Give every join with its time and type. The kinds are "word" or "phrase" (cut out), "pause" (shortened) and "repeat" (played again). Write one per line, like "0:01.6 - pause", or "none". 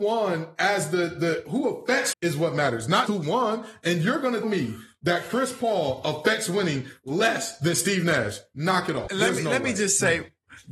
0:02.1 - word
0:03.1 - word
0:04.4 - word
0:09.1 - word